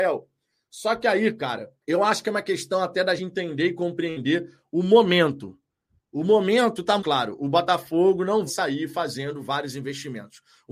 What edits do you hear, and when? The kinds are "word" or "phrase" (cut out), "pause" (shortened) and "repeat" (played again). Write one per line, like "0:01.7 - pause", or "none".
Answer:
0:01.8 - pause
0:03.2 - word
0:07.0 - word
0:08.5 - word